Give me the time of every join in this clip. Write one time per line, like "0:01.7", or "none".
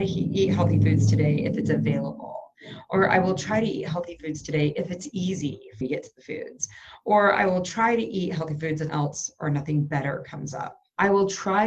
0:05.8
0:08.9